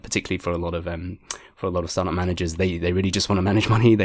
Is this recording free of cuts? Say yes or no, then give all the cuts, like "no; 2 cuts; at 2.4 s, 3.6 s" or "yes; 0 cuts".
yes; 0 cuts